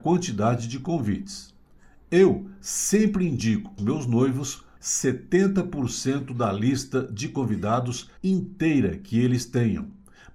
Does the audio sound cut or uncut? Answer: cut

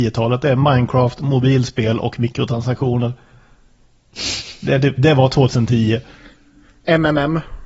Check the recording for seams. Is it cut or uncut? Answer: uncut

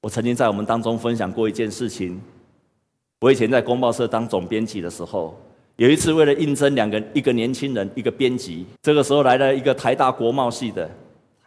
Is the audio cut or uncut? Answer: cut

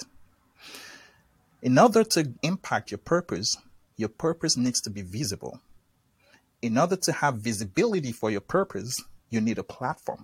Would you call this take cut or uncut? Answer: cut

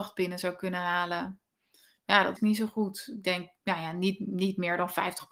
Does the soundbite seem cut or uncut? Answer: cut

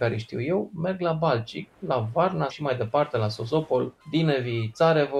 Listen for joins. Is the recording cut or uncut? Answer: cut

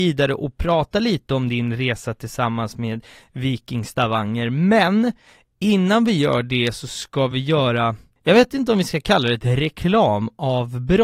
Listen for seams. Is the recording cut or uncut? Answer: uncut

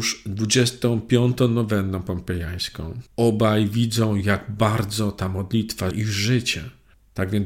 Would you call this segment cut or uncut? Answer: cut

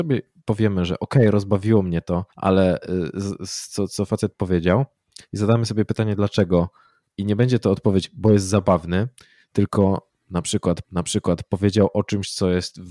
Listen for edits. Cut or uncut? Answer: cut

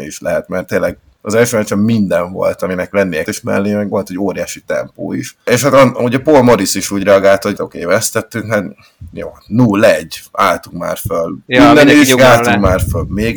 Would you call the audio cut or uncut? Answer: cut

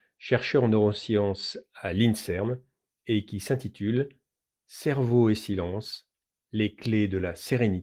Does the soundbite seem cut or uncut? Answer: uncut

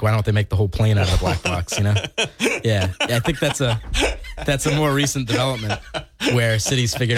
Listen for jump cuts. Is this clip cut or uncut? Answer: uncut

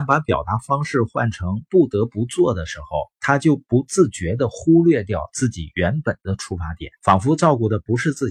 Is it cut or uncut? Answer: cut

